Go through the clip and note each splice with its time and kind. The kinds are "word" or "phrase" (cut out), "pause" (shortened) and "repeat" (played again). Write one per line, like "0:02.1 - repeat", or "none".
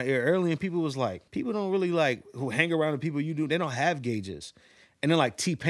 0:01.3 - pause